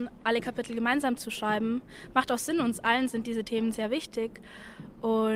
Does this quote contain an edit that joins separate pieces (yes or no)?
no